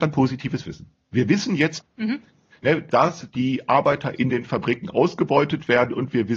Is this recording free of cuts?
no; 2 cuts; at 1.8 s, 2.9 s

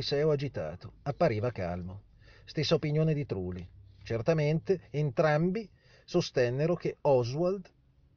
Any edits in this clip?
no; 0 cuts

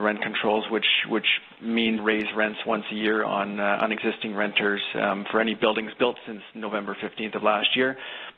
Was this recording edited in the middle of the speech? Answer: yes; 1 cut; at 2.0 s

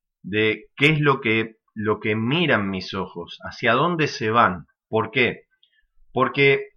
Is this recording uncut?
no; 2 cuts; at 1.7 s, 4.8 s

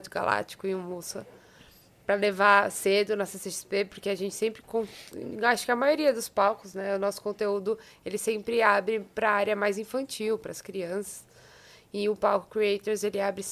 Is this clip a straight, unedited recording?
yes; 0 cuts

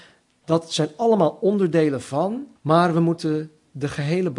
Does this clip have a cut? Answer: yes; 1 cut; at 2.6 s

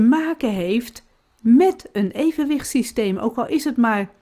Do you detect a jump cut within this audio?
no; 0 cuts

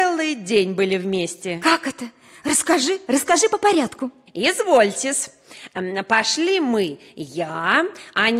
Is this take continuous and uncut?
yes; 0 cuts

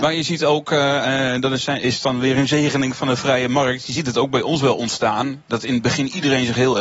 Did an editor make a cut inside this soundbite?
no; 0 cuts

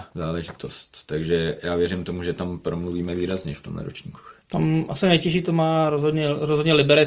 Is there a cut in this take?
no; 0 cuts

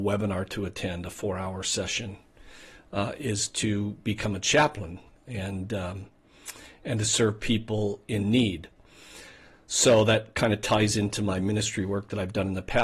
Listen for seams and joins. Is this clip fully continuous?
yes; 0 cuts

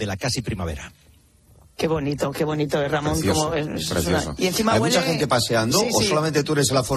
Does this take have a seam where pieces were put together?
no; 0 cuts

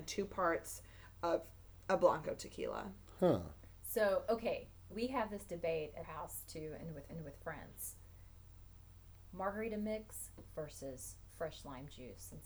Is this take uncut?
no; 4 cuts; at 4.9 s, 6.0 s, 7.1 s, 11.3 s

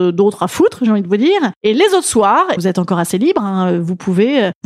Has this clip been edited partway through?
yes; 1 cut; at 2.6 s

